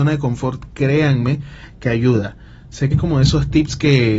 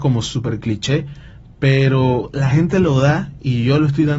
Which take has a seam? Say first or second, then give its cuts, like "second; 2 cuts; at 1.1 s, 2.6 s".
first; 1 cut; at 2.9 s